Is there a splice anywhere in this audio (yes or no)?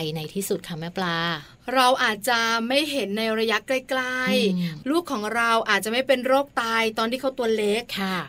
no